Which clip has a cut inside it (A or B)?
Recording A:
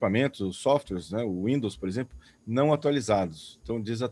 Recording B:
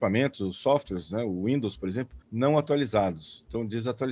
B